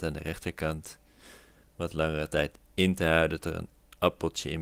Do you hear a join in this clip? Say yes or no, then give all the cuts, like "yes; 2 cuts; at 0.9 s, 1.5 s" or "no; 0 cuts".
yes; 1 cut; at 3.4 s